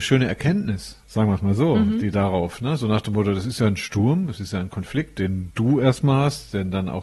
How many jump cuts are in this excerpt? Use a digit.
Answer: 1